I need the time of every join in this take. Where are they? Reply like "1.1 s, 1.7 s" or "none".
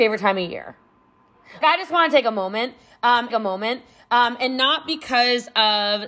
1.6 s, 3.3 s